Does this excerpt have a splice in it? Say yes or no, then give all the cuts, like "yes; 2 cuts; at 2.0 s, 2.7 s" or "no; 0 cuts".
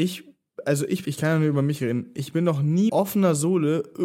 yes; 2 cuts; at 1.0 s, 2.9 s